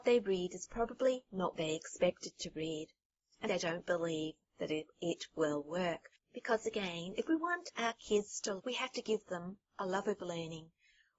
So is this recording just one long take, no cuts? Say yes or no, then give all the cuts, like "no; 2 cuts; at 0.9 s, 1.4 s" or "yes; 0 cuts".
no; 3 cuts; at 1.5 s, 3.4 s, 8.6 s